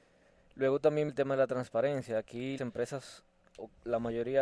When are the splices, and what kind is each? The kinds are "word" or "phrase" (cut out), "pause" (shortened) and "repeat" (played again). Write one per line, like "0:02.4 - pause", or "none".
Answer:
0:01.1 - word
0:02.6 - word